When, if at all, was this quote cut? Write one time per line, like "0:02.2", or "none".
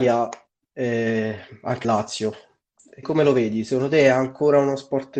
0:01.8
0:03.0